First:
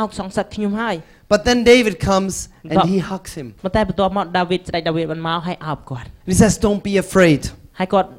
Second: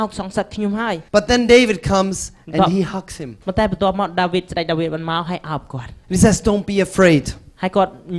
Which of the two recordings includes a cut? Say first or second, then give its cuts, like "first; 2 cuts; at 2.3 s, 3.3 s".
second; 1 cut; at 1.1 s